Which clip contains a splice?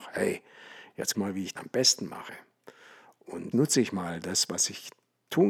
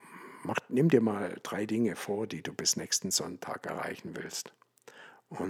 first; 3 cuts; at 1.1 s, 1.6 s, 3.5 s

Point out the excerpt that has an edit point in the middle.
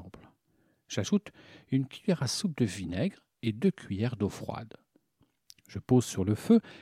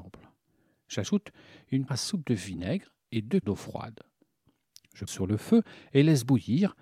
second; 3 cuts; at 1.9 s, 3.4 s, 5.1 s

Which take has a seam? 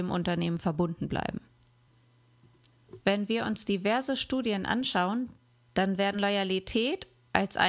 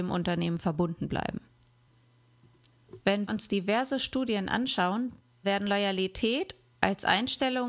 second; 2 cuts; at 3.3 s, 5.4 s

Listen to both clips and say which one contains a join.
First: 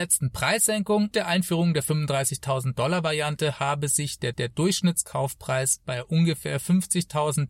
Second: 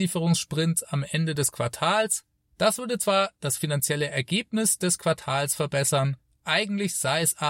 first; 2 cuts; at 1.1 s, 4.3 s

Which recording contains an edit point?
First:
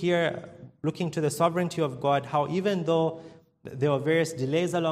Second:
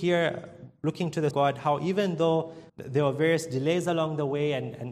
second; 2 cuts; at 1.3 s, 2.7 s

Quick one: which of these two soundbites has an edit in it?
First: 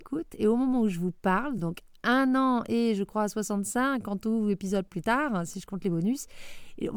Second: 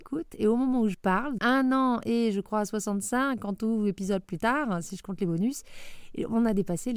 second; 2 cuts; at 0.9 s, 1.4 s

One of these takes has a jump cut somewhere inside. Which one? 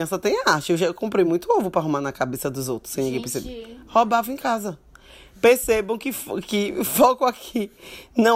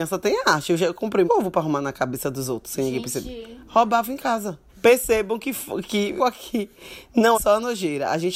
second; 4 cuts; at 1.3 s, 4.7 s, 6.2 s, 7.3 s

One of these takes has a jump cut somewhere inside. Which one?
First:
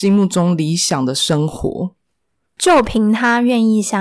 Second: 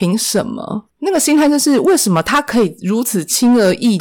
second; 1 cut; at 0.9 s

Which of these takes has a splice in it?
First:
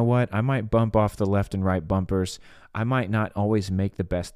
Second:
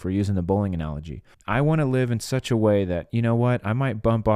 second; 1 cut; at 1.3 s

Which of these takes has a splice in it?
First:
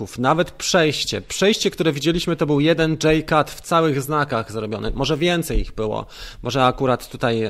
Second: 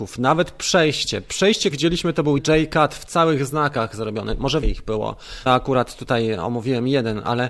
second; 4 cuts; at 1.7 s, 2.4 s, 4.6 s, 5.5 s

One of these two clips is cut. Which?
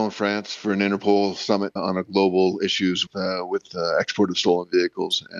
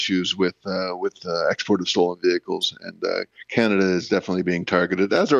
first; 2 cuts; at 1.8 s, 3.1 s

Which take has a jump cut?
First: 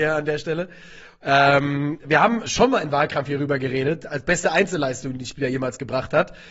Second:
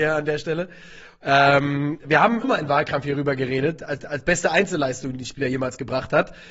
second; 2 cuts; at 2.4 s, 4.0 s

